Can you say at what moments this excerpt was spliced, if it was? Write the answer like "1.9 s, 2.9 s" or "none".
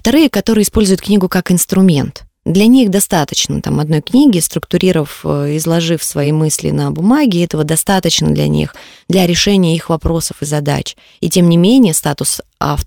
none